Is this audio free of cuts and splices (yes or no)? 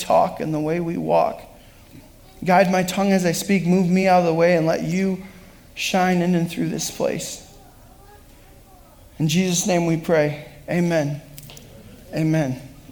yes